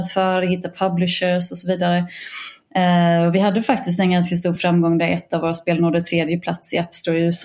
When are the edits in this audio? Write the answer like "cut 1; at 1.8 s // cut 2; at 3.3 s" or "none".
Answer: none